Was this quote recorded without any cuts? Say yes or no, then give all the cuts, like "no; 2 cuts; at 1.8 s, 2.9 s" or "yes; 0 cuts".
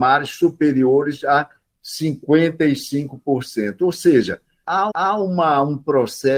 no; 1 cut; at 4.9 s